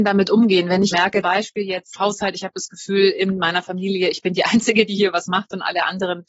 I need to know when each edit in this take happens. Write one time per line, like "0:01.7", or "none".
0:00.9
0:01.2
0:02.0